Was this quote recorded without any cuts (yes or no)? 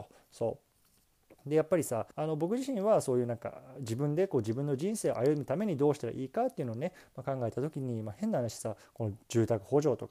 no